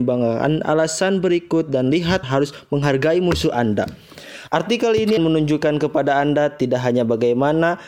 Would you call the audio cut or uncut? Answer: cut